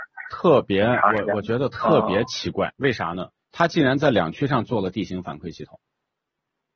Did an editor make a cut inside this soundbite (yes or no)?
yes